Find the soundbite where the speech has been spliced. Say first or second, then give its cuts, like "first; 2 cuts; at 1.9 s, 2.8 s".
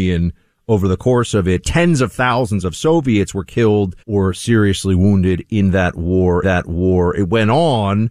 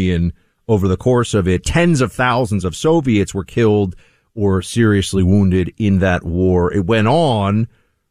first; 2 cuts; at 4.0 s, 6.4 s